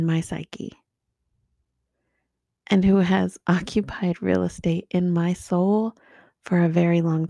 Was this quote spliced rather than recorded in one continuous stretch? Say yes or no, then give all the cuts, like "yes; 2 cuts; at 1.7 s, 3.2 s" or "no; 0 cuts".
no; 0 cuts